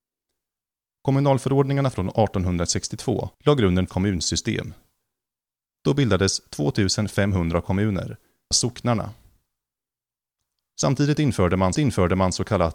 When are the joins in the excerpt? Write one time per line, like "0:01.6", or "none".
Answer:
0:03.3
0:03.9
0:08.5
0:11.7